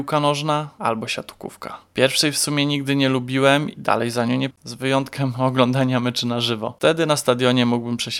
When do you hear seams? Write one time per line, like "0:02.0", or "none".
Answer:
0:03.8
0:04.5